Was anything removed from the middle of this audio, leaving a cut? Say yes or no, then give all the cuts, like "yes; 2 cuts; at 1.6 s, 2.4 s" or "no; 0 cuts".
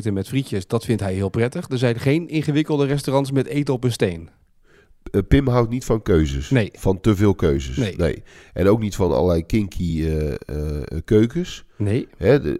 no; 0 cuts